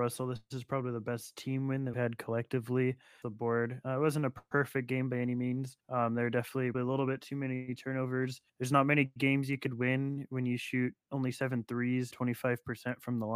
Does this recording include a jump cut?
yes; 6 cuts; at 1.9 s, 3.2 s, 5.8 s, 6.7 s, 8.5 s, 12.1 s

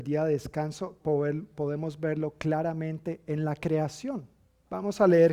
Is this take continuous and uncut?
yes; 0 cuts

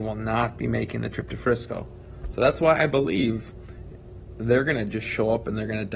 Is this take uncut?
yes; 0 cuts

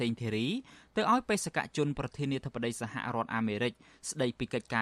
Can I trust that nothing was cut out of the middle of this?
yes; 0 cuts

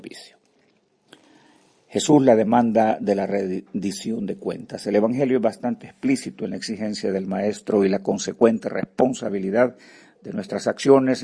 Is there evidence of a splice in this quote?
no; 0 cuts

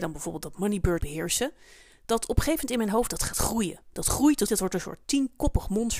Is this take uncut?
no; 2 cuts; at 1.0 s, 4.5 s

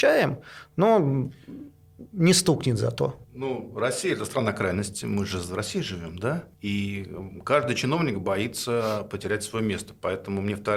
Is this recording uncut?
no; 2 cuts; at 3.2 s, 6.5 s

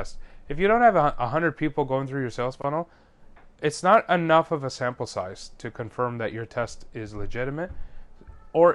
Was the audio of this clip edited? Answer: no; 0 cuts

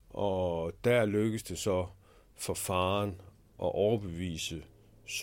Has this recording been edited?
no; 0 cuts

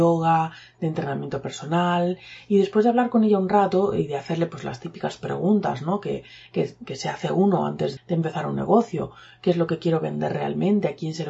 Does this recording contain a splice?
yes; 1 cut; at 8.0 s

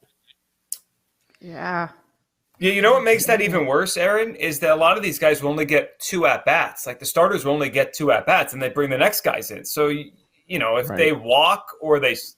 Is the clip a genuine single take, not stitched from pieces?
yes; 0 cuts

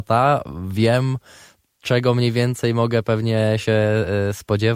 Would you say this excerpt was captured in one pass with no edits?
yes; 0 cuts

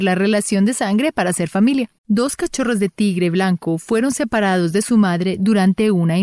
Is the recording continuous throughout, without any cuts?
no; 1 cut; at 2.0 s

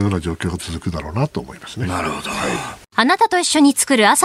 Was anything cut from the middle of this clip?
yes; 1 cut; at 2.9 s

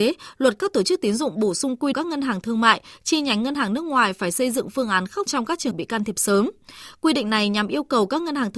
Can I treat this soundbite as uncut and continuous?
no; 3 cuts; at 1.9 s, 5.3 s, 5.7 s

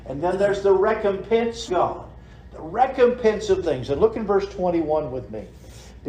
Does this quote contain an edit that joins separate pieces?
yes; 2 cuts; at 1.7 s, 3.6 s

